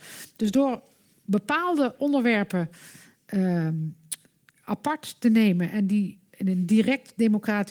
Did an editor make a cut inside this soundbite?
no; 0 cuts

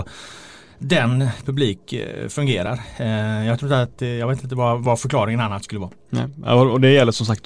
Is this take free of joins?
no; 1 cut; at 1.4 s

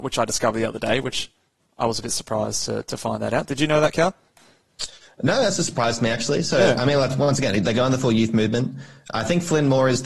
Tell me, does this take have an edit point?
no; 0 cuts

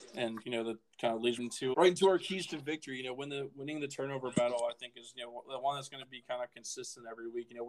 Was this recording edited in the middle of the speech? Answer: yes; 2 cuts; at 1.4 s, 1.7 s

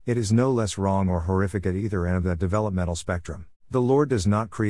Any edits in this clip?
yes; 1 cut; at 3.6 s

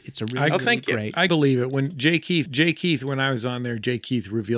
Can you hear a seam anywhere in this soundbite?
yes; 2 cuts; at 1.3 s, 2.5 s

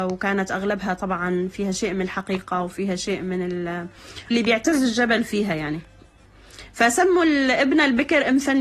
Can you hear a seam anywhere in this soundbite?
yes; 1 cut; at 4.3 s

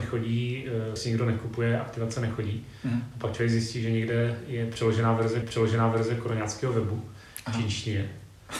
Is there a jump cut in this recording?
yes; 2 cuts; at 1.0 s, 5.4 s

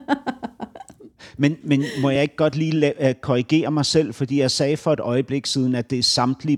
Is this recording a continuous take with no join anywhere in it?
yes; 0 cuts

